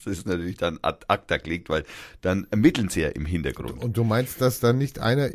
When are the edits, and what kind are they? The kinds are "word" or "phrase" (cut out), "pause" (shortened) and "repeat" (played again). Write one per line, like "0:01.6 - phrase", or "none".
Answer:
none